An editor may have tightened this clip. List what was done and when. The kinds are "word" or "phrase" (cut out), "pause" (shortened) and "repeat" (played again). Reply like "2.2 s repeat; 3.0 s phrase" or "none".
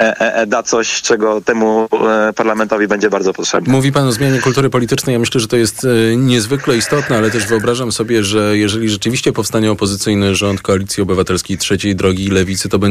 none